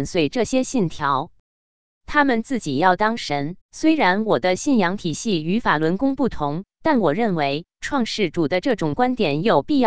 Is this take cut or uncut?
cut